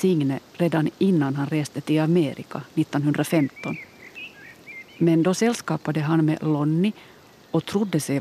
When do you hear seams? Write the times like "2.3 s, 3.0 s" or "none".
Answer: none